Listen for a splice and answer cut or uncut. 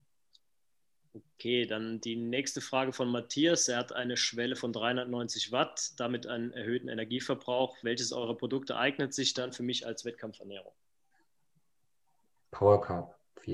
uncut